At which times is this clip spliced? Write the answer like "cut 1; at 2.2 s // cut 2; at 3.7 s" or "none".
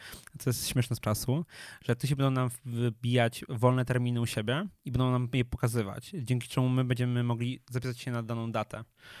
cut 1; at 1.0 s